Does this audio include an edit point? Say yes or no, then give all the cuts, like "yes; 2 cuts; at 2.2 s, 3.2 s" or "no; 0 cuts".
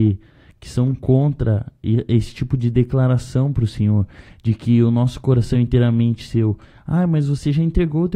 no; 0 cuts